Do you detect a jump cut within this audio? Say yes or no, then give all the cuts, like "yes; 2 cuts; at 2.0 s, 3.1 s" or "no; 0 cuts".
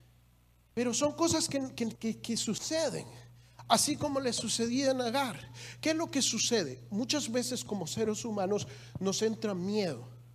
no; 0 cuts